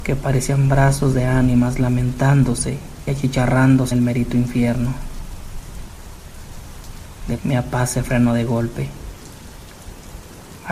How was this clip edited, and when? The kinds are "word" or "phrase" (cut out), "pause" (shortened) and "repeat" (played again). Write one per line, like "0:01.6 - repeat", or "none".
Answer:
0:03.1 - word
0:03.9 - word
0:07.4 - word